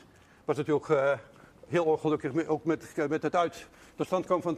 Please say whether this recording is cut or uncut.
uncut